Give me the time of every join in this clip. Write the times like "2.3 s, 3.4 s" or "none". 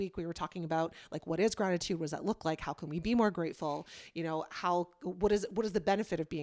none